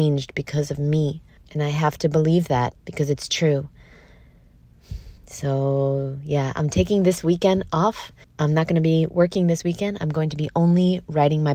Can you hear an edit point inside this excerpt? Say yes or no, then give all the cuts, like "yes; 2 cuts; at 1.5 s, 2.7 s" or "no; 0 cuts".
yes; 4 cuts; at 1.4 s, 2.8 s, 5.2 s, 8.2 s